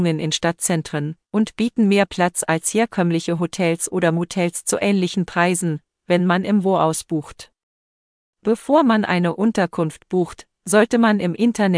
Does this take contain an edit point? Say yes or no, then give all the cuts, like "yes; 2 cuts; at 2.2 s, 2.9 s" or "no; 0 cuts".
no; 0 cuts